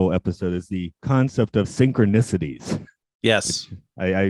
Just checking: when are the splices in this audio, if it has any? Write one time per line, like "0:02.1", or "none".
0:01.0
0:01.6
0:03.0